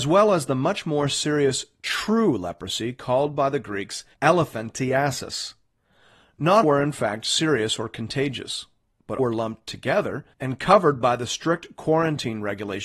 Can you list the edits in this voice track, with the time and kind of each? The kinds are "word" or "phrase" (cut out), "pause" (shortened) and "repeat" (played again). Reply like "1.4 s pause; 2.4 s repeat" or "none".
4.1 s pause; 6.6 s word; 9.2 s word; 10.3 s pause